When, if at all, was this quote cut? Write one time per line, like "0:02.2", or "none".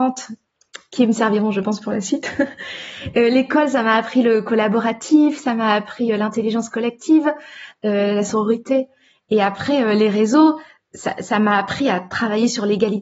none